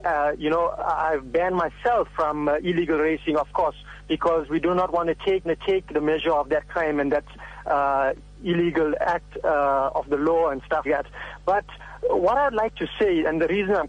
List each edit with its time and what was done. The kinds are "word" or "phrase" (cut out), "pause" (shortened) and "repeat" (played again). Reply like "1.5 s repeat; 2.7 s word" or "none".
5.4 s repeat; 10.8 s word